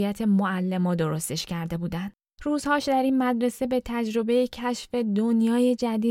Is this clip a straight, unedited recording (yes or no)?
yes